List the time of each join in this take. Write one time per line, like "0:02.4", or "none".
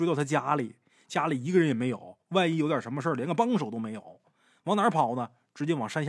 none